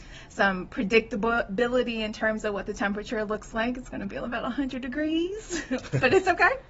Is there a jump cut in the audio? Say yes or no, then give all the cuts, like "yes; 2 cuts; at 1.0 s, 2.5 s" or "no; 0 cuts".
no; 0 cuts